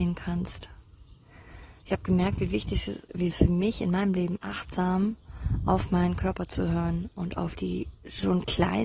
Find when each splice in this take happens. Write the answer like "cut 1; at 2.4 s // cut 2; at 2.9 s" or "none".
cut 1; at 3.3 s // cut 2; at 4.4 s